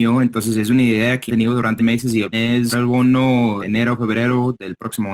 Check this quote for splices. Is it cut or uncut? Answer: cut